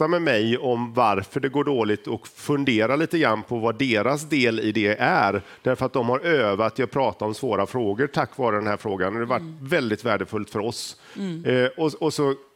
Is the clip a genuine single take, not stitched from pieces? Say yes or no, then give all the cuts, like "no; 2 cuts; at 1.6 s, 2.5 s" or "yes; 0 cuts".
yes; 0 cuts